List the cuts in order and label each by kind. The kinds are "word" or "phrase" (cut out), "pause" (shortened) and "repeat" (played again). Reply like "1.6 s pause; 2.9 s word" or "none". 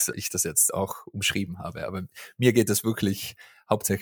none